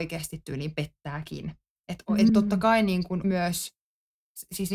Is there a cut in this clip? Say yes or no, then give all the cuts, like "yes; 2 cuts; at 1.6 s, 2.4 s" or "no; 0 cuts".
yes; 2 cuts; at 2.3 s, 3.2 s